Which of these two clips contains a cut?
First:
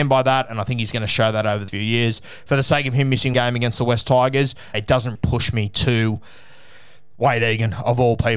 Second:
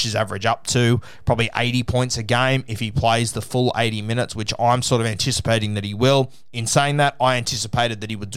first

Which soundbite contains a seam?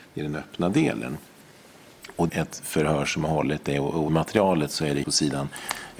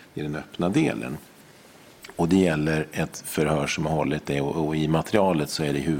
first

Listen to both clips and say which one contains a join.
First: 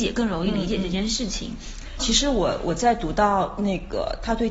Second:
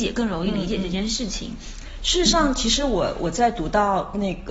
first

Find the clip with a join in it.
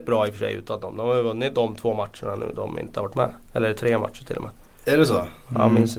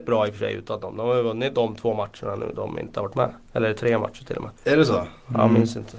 second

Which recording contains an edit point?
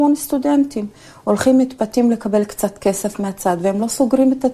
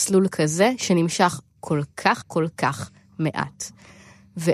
second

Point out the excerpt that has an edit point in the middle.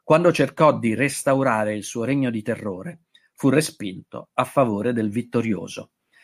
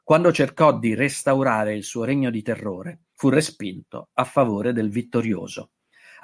second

